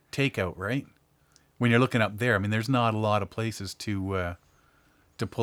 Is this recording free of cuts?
yes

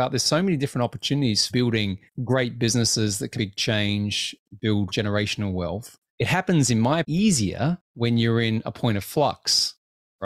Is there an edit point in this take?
yes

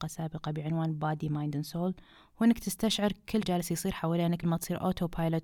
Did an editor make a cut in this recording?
yes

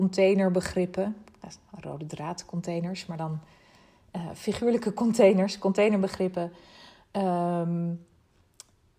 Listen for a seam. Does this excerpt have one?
no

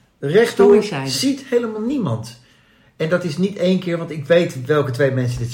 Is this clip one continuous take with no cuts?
yes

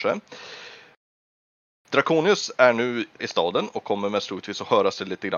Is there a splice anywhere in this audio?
yes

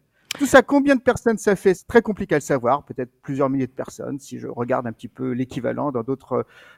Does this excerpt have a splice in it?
yes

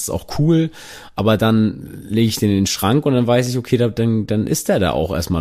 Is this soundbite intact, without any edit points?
yes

